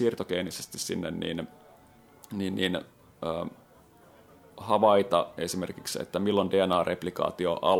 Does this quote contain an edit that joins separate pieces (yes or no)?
no